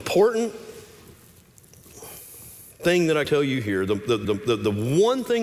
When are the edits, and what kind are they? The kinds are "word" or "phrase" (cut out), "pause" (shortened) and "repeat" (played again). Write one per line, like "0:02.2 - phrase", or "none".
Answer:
0:03.2 - word
0:04.2 - repeat